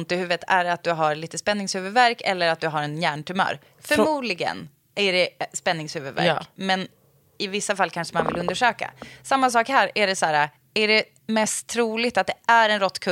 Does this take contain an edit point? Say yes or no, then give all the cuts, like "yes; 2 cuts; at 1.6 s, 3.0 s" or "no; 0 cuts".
no; 0 cuts